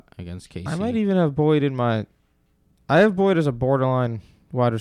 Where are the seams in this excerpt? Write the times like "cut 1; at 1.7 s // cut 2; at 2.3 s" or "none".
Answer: none